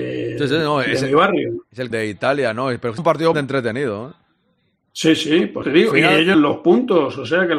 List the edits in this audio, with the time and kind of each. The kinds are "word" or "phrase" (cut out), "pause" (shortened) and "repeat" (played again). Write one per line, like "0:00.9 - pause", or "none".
0:01.9 - word
0:03.0 - word
0:03.3 - word
0:05.6 - word
0:06.3 - word